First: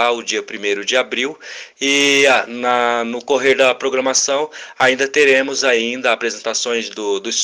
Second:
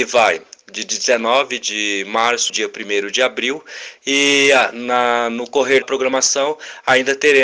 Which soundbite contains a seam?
second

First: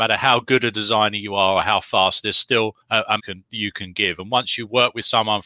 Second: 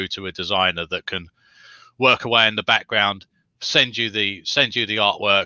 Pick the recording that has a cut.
first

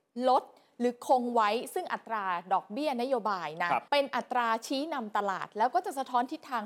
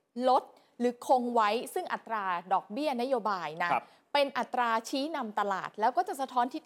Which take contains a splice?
first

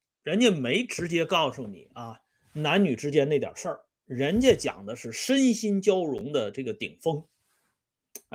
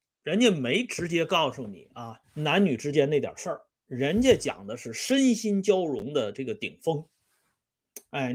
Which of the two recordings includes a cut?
second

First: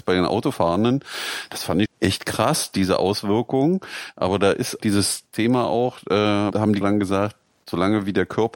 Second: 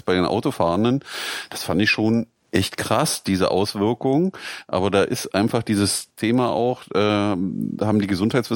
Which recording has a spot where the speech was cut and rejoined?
first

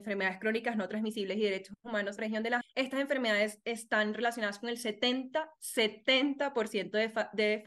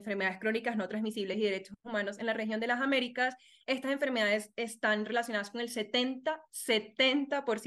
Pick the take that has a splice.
first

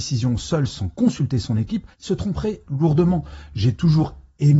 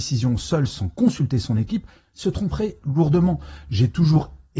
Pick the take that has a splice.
first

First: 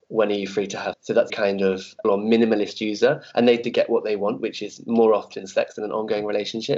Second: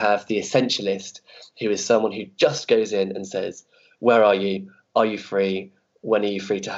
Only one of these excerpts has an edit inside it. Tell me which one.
first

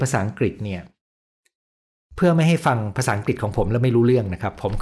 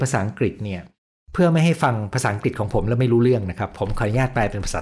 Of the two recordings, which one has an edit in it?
second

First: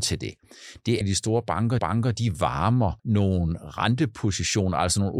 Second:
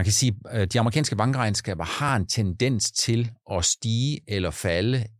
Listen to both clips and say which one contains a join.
first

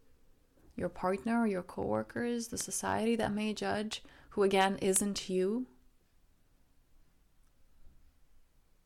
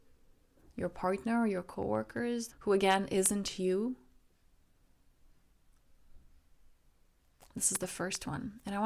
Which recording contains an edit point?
second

